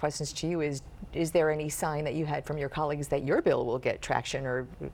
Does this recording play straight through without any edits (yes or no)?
yes